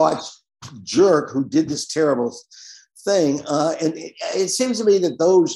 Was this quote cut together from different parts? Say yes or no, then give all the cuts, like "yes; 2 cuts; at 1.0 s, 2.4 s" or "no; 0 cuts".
no; 0 cuts